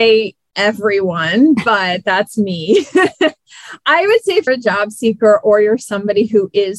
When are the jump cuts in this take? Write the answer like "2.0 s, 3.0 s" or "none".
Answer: 4.5 s

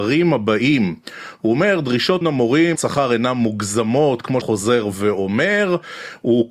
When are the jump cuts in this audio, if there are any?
2.2 s, 2.7 s, 4.4 s

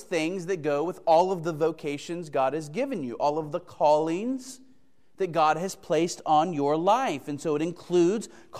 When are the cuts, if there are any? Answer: none

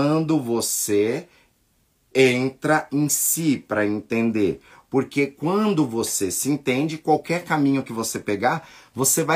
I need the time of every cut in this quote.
none

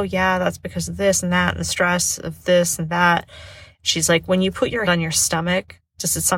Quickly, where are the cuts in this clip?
4.9 s

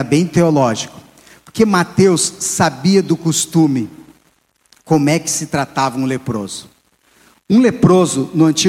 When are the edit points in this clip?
none

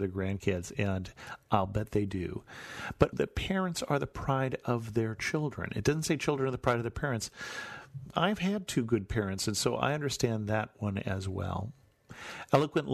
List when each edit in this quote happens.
3.1 s

